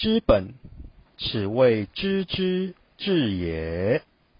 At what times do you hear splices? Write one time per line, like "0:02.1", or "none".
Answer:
0:01.1